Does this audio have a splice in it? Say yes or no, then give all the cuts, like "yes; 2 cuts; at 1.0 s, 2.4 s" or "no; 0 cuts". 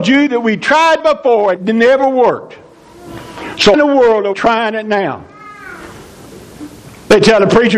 yes; 4 cuts; at 1.0 s, 1.6 s, 3.7 s, 4.3 s